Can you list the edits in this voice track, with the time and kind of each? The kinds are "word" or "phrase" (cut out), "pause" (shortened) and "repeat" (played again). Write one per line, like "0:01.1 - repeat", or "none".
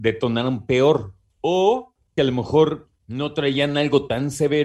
0:02.2 - phrase